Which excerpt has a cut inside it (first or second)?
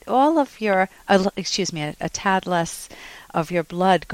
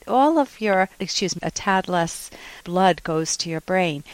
second